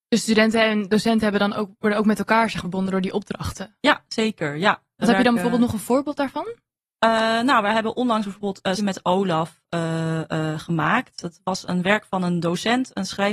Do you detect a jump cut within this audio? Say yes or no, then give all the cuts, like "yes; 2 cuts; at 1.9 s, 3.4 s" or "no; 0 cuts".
yes; 2 cuts; at 2.6 s, 8.8 s